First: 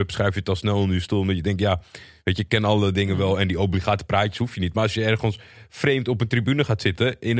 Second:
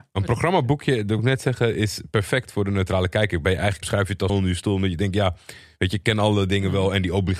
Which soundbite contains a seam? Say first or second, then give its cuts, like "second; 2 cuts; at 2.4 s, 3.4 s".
second; 3 cuts; at 1.2 s, 3.8 s, 4.3 s